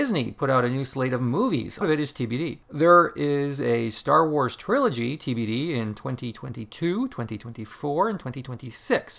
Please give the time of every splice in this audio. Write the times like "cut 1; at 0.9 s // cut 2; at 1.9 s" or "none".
cut 1; at 1.8 s // cut 2; at 2.6 s